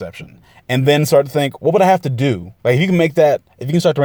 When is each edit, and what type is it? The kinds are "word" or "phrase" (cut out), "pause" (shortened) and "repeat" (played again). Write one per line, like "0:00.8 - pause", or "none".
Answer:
0:02.6 - pause